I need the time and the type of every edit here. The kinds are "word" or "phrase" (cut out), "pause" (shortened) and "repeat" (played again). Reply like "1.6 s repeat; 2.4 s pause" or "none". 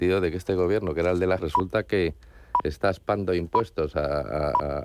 1.4 s word